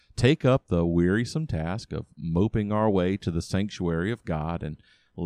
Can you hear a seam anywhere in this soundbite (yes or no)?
no